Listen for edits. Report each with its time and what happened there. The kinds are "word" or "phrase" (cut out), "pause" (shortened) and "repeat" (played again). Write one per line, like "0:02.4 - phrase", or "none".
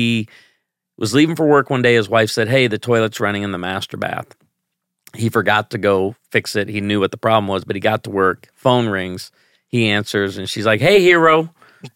none

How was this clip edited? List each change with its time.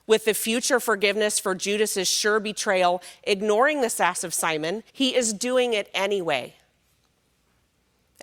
0:04.9 - pause

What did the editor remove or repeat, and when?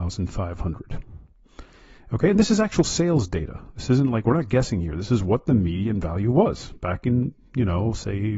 none

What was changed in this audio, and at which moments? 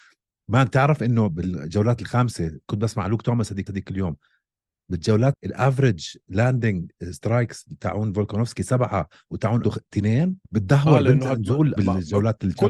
0:03.7 - repeat
0:05.3 - word
0:09.6 - word
0:10.4 - pause
0:11.8 - word

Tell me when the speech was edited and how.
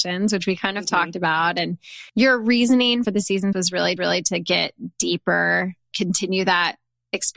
0:02.1 - pause
0:03.0 - phrase
0:03.5 - word
0:04.0 - repeat
0:05.9 - word

